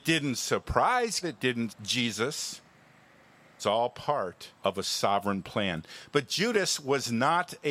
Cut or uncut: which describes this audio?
cut